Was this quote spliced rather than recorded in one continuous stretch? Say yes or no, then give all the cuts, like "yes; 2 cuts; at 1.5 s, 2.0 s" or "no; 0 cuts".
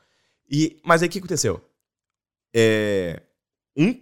no; 0 cuts